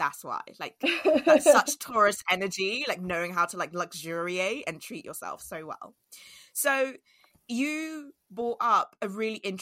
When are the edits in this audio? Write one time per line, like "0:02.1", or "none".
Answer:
none